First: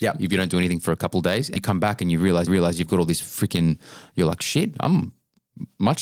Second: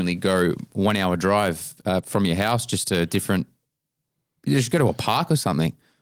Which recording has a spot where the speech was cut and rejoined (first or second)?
first